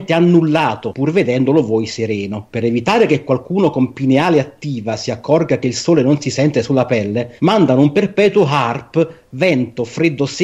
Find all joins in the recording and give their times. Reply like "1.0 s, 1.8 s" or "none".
7.4 s